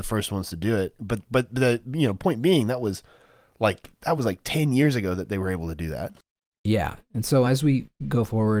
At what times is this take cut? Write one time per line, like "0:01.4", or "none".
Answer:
none